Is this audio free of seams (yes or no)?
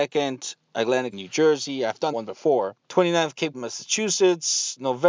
no